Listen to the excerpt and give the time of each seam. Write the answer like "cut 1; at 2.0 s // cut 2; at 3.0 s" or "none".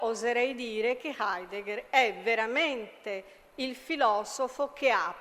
none